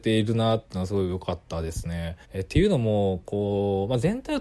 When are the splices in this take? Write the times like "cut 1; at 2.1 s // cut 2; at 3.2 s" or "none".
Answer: cut 1; at 1.4 s // cut 2; at 2.2 s